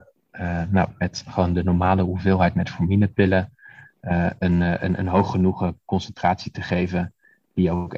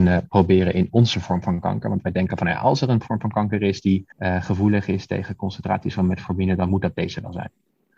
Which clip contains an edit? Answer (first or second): second